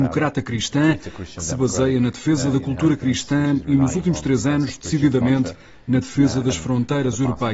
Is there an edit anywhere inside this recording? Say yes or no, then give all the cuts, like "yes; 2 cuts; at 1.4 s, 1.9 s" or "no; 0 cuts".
no; 0 cuts